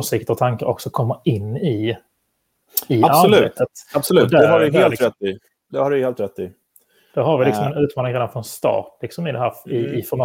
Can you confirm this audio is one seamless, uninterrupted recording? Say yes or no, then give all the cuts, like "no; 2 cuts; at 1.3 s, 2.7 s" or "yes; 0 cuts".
yes; 0 cuts